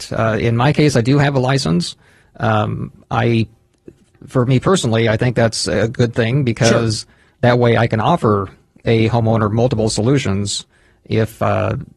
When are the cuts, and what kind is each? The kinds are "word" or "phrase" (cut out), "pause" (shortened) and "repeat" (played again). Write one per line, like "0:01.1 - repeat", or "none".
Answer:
none